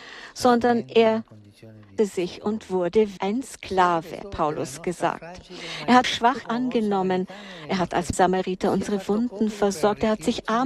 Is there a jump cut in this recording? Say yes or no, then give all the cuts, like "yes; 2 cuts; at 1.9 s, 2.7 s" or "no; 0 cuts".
yes; 6 cuts; at 2.0 s, 3.2 s, 4.2 s, 6.0 s, 6.4 s, 8.1 s